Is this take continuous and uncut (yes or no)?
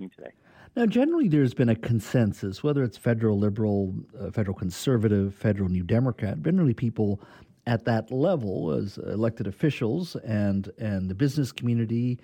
yes